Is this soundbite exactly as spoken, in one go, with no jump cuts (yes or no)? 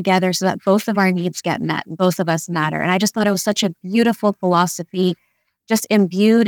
yes